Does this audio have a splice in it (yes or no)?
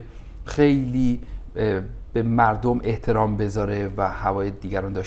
no